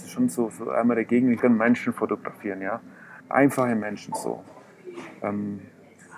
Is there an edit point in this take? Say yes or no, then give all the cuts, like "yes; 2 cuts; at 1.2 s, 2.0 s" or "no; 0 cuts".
yes; 2 cuts; at 1.4 s, 3.2 s